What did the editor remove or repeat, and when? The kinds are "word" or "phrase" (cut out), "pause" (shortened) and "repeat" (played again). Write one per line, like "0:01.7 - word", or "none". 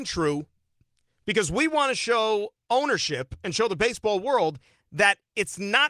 none